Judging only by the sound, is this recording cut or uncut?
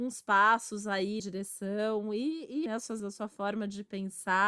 cut